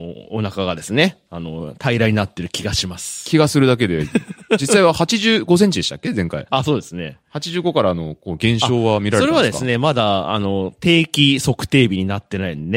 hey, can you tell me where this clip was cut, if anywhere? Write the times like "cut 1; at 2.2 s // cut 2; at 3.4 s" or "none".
none